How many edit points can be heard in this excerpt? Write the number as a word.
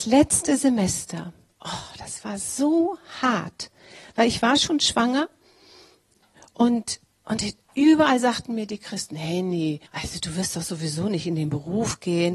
one